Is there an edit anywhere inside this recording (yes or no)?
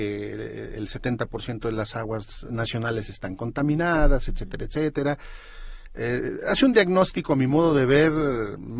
yes